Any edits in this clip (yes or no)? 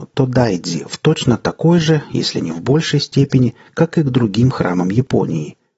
no